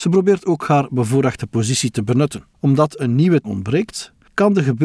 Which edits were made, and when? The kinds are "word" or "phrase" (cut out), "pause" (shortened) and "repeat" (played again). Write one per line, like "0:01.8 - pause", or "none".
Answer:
0:02.5 - pause
0:03.4 - word